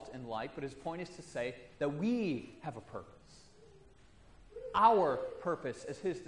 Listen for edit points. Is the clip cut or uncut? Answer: uncut